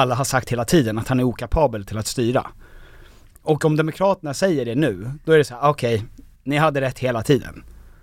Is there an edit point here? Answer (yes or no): no